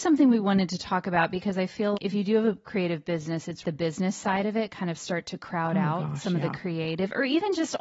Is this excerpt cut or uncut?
cut